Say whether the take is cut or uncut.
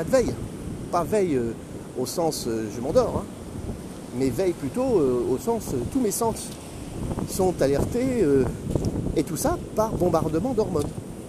uncut